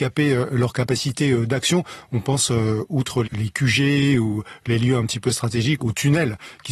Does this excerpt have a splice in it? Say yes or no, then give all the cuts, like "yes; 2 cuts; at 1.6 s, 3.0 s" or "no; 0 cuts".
yes; 2 cuts; at 3.2 s, 5.8 s